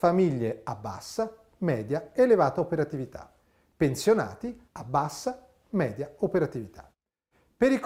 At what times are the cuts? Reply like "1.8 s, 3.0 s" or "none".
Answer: 4.7 s